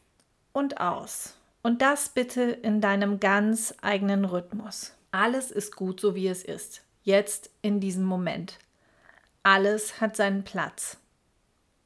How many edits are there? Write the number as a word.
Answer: one